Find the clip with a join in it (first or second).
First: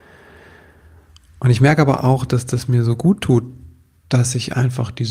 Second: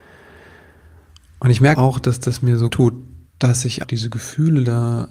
second